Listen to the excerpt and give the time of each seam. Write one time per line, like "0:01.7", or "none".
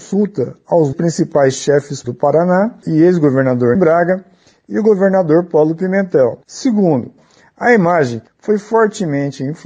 0:00.9
0:02.0
0:02.8
0:03.7
0:06.4
0:08.3